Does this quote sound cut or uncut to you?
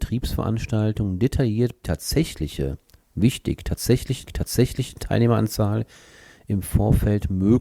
cut